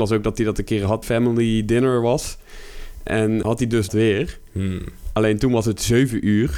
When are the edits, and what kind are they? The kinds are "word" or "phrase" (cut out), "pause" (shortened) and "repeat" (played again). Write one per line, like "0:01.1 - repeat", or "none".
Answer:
0:01.0 - phrase
0:03.4 - word
0:03.9 - word